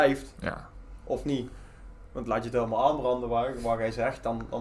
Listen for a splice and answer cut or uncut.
uncut